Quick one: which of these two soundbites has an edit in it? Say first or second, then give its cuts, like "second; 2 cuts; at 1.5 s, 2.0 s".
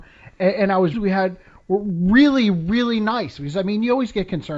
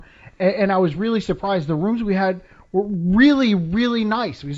first; 1 cut; at 0.9 s